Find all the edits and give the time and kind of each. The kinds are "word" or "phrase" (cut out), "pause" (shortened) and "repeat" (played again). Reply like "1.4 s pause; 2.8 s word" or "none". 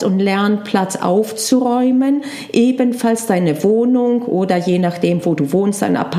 none

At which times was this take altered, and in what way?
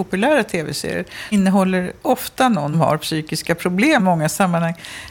1.3 s word; 2.7 s word; 4.0 s word

